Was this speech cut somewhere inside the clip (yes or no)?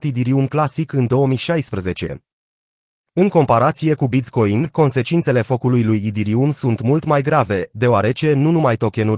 no